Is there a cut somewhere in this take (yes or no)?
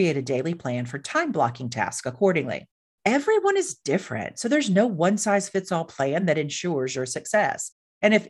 no